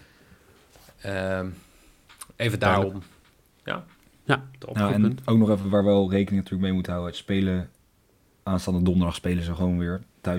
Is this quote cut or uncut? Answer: uncut